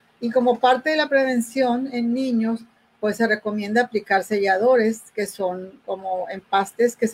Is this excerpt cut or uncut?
uncut